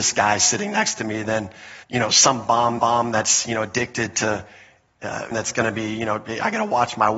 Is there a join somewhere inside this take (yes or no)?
yes